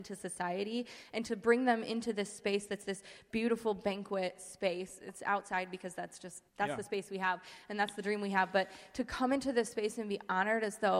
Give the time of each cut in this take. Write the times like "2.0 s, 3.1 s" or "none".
6.5 s